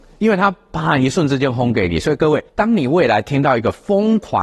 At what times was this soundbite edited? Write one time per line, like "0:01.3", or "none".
0:02.5